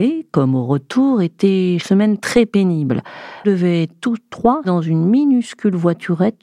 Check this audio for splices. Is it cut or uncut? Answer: cut